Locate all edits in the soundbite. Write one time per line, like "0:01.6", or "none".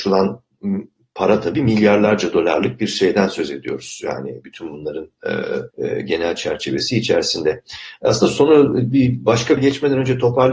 0:05.7
0:09.6